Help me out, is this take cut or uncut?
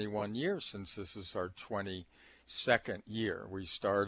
uncut